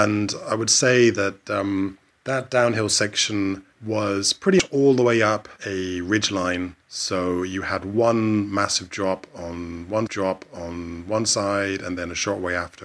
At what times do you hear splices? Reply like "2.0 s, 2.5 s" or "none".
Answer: 2.1 s, 3.7 s, 5.6 s, 6.8 s, 10.1 s

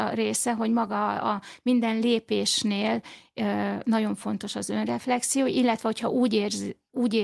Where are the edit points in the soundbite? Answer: none

